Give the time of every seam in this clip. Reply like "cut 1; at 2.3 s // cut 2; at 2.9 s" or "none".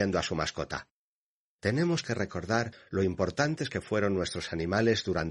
none